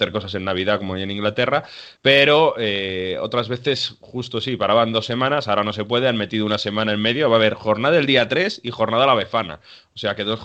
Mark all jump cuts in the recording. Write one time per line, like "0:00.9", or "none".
0:01.9